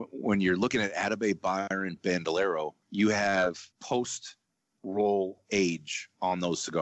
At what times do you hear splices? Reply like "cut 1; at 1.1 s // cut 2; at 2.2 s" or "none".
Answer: cut 1; at 2.8 s // cut 2; at 3.7 s